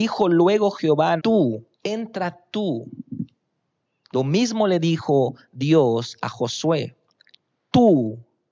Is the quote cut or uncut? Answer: cut